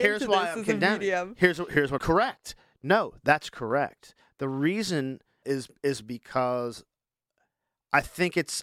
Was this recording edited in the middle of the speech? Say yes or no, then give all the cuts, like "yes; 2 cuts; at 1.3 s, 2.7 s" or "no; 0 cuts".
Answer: yes; 2 cuts; at 2.0 s, 5.4 s